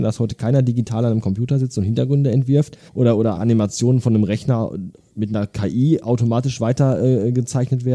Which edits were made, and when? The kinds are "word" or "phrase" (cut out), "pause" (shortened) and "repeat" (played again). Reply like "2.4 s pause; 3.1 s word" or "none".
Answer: 2.9 s pause; 3.3 s word